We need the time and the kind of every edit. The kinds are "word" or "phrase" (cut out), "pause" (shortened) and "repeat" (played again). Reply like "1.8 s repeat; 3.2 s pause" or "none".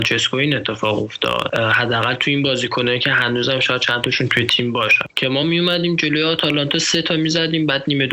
none